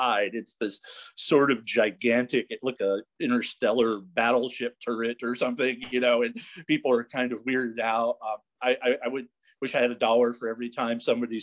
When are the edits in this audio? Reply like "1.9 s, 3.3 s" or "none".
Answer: 2.7 s